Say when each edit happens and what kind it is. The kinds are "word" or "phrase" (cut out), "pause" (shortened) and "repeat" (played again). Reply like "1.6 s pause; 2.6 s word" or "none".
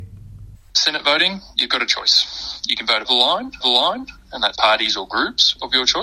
3.0 s word; 3.6 s repeat; 4.5 s word